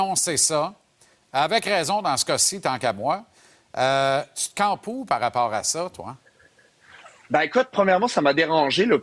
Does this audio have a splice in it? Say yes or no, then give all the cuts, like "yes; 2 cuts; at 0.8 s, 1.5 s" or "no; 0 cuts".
no; 0 cuts